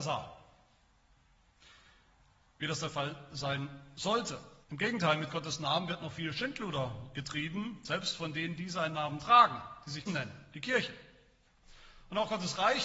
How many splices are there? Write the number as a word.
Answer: two